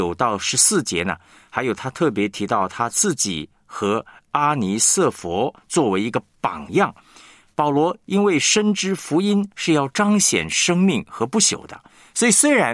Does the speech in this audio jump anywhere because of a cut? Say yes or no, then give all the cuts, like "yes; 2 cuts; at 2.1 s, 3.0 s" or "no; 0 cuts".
no; 0 cuts